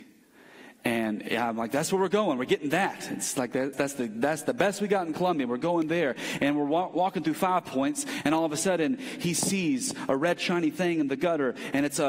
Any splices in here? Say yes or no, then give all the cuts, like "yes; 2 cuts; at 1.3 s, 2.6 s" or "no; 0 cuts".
yes; 1 cut; at 3.7 s